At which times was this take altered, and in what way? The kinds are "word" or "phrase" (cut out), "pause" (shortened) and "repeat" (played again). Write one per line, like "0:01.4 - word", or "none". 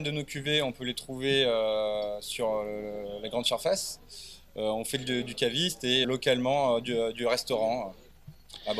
0:06.0 - word

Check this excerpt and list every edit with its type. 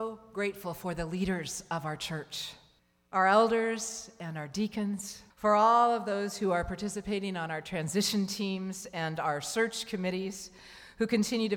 0:02.8 - pause
0:05.3 - pause

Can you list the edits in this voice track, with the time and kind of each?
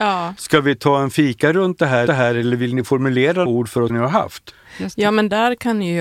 0:02.1 - repeat
0:03.5 - word
0:03.9 - phrase

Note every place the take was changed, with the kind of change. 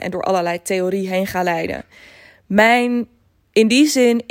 none

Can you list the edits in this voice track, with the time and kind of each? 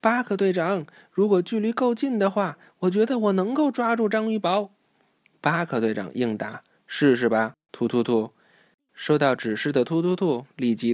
none

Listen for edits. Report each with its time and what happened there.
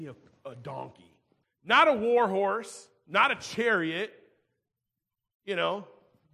0:01.4 - pause

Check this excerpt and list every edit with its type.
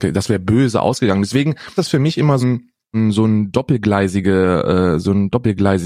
0:01.8 - word
0:02.4 - word
0:02.9 - word

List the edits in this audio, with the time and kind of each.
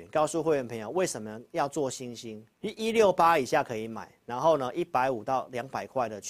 0:02.5 - pause

